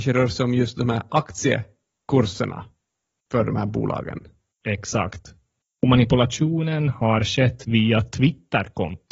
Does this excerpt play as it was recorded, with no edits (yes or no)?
yes